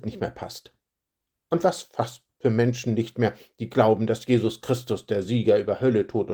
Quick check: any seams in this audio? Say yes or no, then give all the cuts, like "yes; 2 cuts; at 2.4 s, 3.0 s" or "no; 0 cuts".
no; 0 cuts